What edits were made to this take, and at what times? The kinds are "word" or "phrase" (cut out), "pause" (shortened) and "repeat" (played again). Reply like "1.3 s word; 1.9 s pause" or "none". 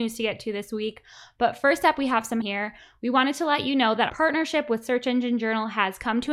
2.4 s word; 4.1 s word

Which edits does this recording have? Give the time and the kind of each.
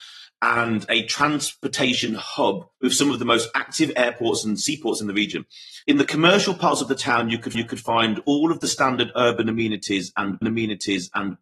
2.7 s pause; 5.8 s pause; 7.5 s repeat; 10.4 s repeat

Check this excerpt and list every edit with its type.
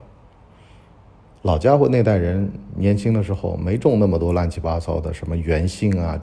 none

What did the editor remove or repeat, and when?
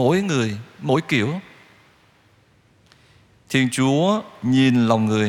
none

